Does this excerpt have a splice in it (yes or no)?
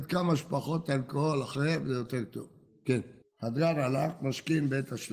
no